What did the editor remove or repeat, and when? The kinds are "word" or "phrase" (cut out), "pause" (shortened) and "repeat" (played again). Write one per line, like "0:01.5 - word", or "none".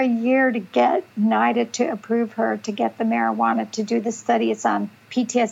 0:01.1 - pause